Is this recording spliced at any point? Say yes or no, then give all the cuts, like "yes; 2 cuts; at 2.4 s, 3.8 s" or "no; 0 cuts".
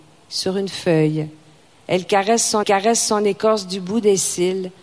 yes; 1 cut; at 2.6 s